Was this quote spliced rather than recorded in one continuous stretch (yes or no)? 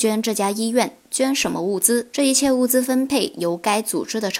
yes